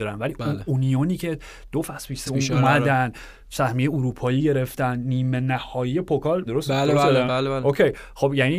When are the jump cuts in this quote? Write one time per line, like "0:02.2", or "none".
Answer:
0:02.3
0:06.5
0:07.3